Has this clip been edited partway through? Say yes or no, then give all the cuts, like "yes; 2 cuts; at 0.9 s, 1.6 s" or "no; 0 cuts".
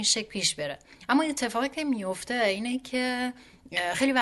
no; 0 cuts